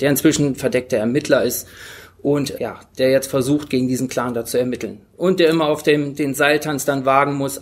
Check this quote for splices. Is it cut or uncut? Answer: cut